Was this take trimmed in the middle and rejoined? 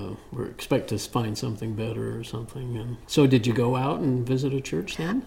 yes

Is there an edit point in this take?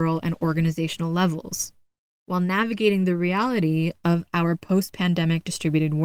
no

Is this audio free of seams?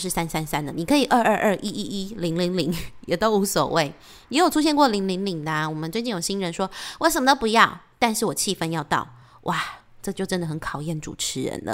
yes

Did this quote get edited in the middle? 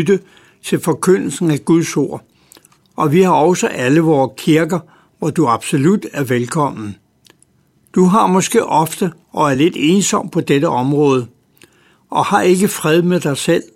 no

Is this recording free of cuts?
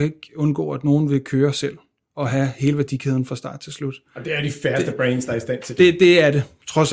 yes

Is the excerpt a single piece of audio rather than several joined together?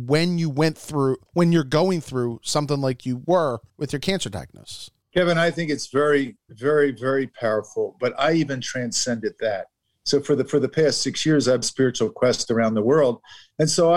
no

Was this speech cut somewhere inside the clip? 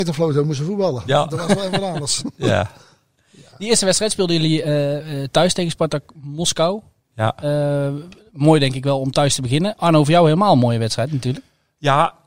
no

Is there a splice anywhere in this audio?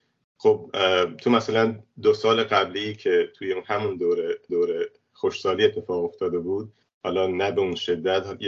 yes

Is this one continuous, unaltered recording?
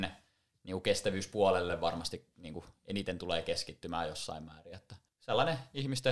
no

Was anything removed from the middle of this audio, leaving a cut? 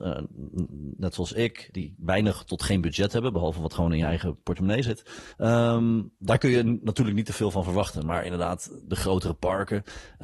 yes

